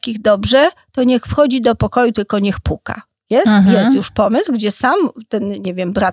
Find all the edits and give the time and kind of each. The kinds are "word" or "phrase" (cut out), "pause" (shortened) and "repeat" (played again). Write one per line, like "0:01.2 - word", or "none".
none